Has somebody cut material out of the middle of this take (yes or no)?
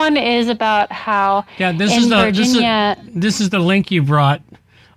no